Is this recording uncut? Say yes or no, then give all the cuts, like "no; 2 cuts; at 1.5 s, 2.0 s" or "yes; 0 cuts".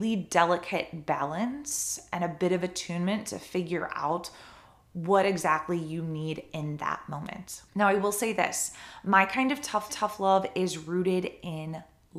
no; 2 cuts; at 7.7 s, 9.9 s